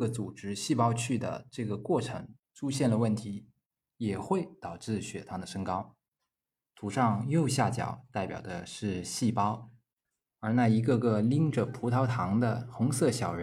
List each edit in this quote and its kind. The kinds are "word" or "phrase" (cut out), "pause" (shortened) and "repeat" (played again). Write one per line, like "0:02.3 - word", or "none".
none